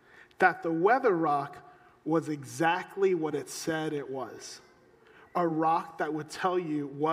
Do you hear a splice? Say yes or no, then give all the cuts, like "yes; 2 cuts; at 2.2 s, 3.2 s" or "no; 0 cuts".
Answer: no; 0 cuts